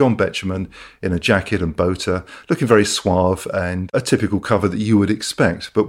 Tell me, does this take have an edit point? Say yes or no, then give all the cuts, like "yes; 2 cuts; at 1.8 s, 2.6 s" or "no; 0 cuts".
no; 0 cuts